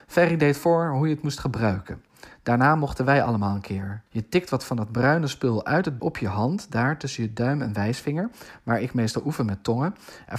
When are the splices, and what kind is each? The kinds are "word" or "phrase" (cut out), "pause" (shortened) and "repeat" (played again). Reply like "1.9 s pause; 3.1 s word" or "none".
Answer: 4.1 s pause; 6.0 s word